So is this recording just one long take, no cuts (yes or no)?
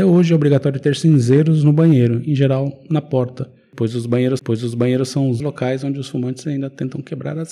no